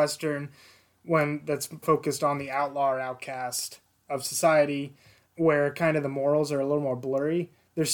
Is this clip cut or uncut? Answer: cut